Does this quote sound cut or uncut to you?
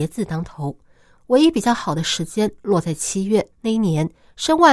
cut